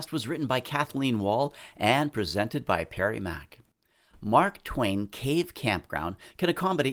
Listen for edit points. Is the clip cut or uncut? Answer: uncut